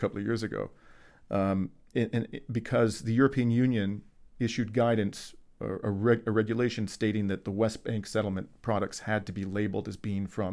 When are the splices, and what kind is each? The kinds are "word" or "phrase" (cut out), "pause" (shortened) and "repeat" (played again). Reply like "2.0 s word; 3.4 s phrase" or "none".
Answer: 1.9 s word